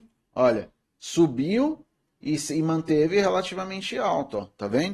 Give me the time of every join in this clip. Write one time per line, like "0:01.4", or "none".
none